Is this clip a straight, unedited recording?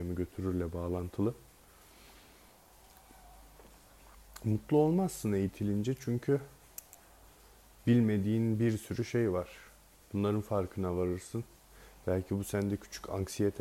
yes; 0 cuts

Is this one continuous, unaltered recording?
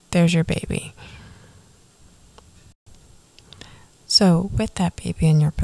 yes; 0 cuts

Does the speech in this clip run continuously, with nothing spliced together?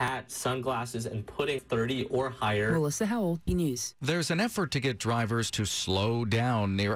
no; 2 cuts; at 1.6 s, 3.5 s

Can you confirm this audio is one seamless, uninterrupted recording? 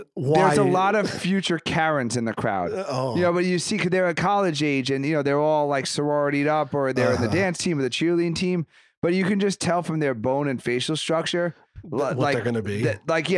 yes; 0 cuts

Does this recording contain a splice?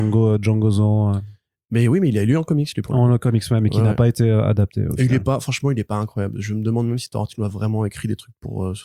no; 0 cuts

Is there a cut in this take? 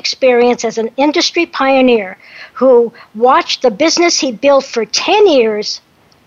no; 0 cuts

